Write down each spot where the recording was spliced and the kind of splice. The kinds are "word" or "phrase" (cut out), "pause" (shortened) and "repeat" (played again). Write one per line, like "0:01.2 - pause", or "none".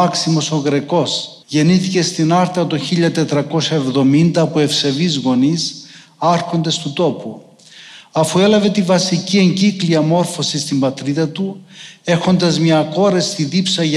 0:01.4 - pause